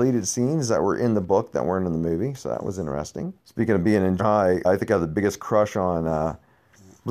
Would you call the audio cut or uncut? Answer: cut